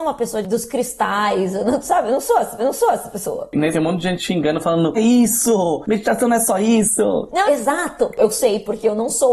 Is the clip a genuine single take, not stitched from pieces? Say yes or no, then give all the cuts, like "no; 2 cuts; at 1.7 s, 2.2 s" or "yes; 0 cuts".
no; 4 cuts; at 2.6 s, 3.7 s, 4.9 s, 7.5 s